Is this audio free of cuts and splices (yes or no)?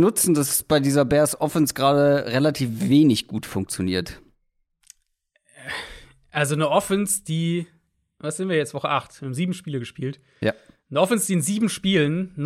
yes